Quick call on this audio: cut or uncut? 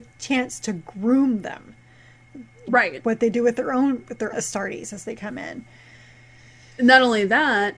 cut